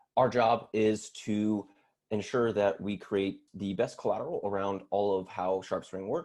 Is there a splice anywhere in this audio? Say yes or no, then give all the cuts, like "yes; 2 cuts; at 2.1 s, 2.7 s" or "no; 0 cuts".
yes; 1 cut; at 3.5 s